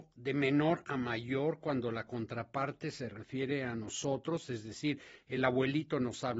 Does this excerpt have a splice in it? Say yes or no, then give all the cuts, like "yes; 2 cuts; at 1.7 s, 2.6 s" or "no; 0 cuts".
no; 0 cuts